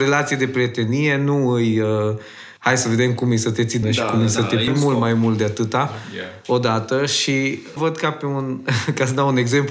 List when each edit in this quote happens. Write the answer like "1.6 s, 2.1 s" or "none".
2.6 s, 3.8 s, 4.7 s, 7.8 s